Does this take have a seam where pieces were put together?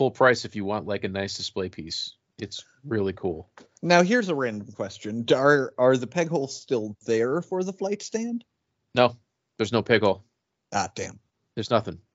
no; 0 cuts

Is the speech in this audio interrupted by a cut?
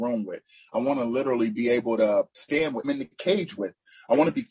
yes; 2 cuts; at 2.3 s, 2.8 s

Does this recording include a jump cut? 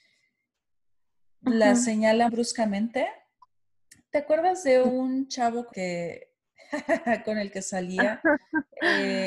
yes; 2 cuts; at 2.3 s, 5.7 s

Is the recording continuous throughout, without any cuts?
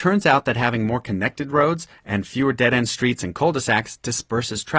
yes; 0 cuts

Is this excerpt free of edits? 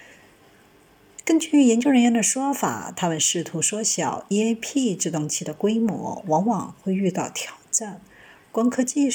yes; 0 cuts

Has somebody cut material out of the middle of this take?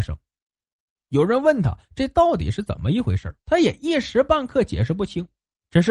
yes; 1 cut; at 3.4 s

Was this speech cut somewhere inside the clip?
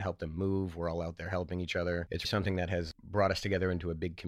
yes; 1 cut; at 2.2 s

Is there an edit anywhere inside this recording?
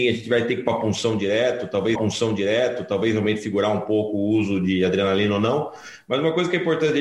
yes; 1 cut; at 1.9 s

